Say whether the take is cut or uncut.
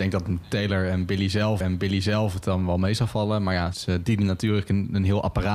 cut